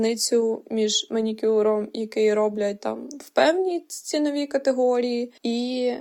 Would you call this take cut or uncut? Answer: uncut